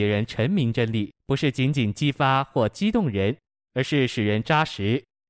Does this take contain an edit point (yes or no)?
yes